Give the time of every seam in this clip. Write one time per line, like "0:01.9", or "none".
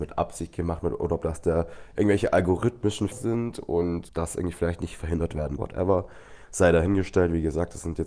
0:03.1
0:04.1
0:05.6